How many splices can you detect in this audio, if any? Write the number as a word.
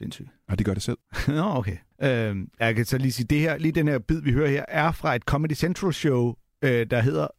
two